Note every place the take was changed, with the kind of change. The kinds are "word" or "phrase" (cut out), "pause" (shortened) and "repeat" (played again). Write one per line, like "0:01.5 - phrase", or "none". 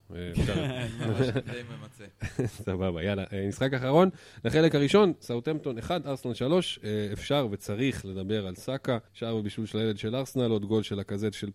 0:09.1 - pause